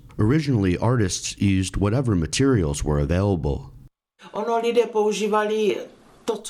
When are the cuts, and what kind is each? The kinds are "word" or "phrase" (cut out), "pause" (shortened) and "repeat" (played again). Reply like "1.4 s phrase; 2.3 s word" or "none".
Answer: none